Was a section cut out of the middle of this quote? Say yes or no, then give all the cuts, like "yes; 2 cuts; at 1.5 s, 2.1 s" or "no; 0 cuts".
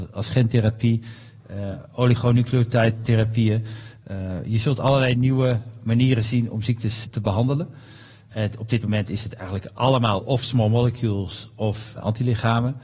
no; 0 cuts